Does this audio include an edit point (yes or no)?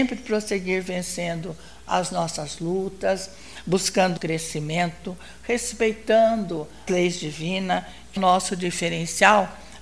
yes